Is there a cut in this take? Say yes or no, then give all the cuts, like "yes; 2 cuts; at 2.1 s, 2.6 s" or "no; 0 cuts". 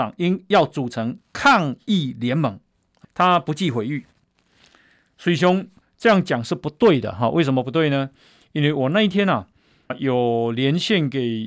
yes; 2 cuts; at 3.0 s, 9.9 s